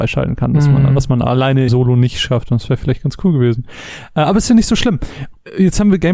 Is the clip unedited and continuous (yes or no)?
no